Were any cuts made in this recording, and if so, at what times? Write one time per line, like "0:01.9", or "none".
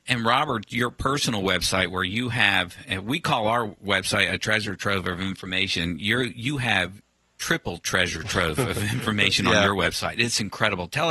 none